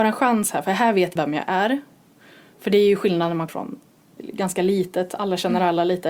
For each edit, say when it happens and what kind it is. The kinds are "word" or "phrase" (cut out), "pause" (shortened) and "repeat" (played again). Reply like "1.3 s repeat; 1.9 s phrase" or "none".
1.2 s word; 3.5 s word; 4.2 s word